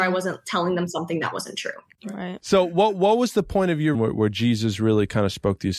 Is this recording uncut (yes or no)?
no